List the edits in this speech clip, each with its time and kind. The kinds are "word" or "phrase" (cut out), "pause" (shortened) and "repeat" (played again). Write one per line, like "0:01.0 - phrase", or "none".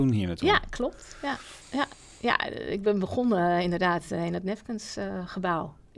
0:01.6 - pause